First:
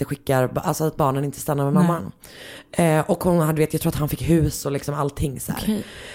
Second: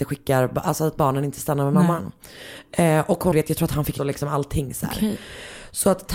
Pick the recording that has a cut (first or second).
second